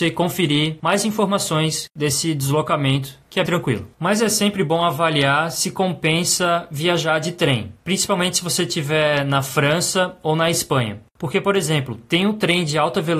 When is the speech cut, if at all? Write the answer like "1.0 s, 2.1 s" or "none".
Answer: 3.5 s, 3.9 s